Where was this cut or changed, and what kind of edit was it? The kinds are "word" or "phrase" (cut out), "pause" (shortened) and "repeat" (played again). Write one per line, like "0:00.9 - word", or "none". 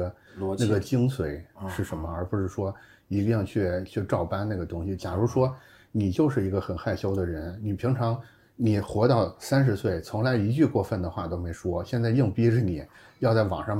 none